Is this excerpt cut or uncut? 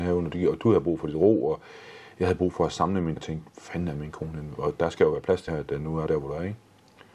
cut